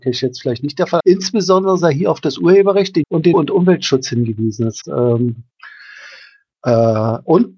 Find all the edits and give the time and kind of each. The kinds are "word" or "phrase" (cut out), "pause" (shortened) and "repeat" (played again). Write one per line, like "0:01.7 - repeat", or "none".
0:01.0 - word
0:03.0 - word
0:03.3 - word
0:04.8 - word